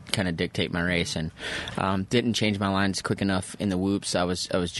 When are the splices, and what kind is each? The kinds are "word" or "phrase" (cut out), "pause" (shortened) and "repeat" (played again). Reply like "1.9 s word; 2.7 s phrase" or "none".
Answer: 3.0 s word